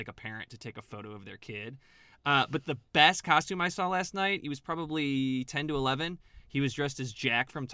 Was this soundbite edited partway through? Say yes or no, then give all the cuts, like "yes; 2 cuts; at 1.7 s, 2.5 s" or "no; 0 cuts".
no; 0 cuts